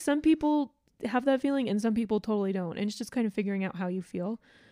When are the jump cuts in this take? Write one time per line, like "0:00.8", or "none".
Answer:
none